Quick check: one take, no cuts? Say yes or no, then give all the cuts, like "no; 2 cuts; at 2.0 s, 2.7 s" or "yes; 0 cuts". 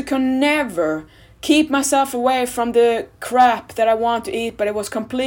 yes; 0 cuts